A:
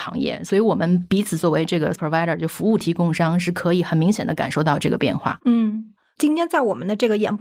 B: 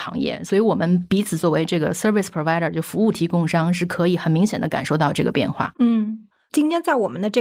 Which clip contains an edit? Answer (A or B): A